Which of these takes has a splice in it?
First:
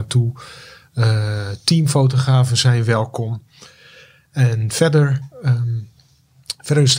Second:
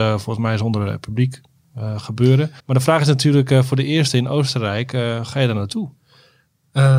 second; 1 cut; at 2.6 s

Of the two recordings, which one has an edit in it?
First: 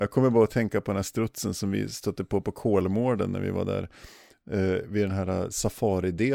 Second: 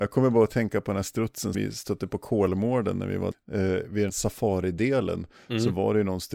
second; 4 cuts; at 1.5 s, 2.1 s, 3.3 s, 4.1 s

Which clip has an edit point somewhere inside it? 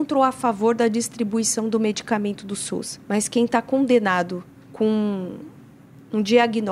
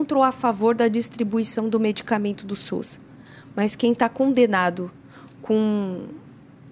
first; 2 cuts; at 3.0 s, 4.6 s

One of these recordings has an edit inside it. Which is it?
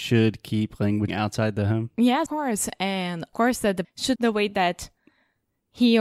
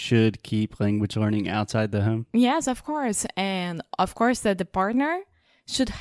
first; 5 cuts; at 1.1 s, 2.3 s, 3.3 s, 3.8 s, 4.2 s

